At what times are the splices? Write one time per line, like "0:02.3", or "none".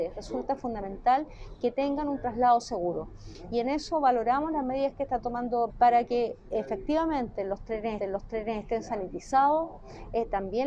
0:05.7
0:08.0